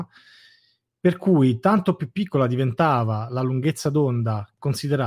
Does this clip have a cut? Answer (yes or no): no